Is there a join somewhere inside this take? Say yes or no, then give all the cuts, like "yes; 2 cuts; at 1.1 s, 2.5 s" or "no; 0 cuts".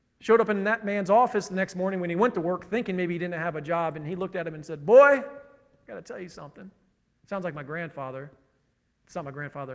no; 0 cuts